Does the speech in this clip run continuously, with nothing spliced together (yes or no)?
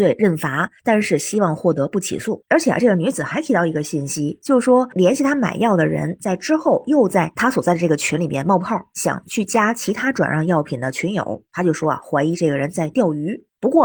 yes